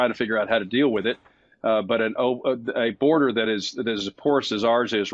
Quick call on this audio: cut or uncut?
uncut